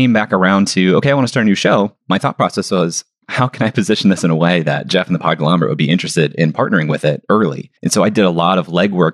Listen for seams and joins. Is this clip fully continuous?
no; 2 cuts; at 2.0 s, 7.8 s

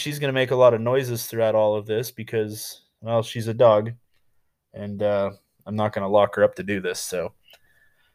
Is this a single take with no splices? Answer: yes; 0 cuts

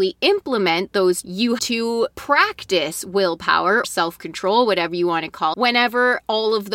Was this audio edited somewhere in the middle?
yes; 4 cuts; at 1.2 s, 1.6 s, 3.8 s, 5.5 s

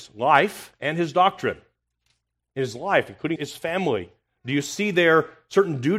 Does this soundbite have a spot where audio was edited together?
yes; 1 cut; at 3.4 s

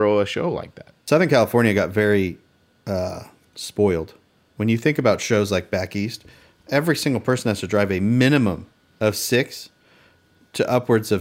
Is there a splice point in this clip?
no; 0 cuts

